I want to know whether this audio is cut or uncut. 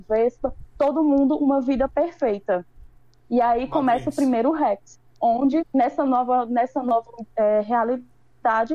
uncut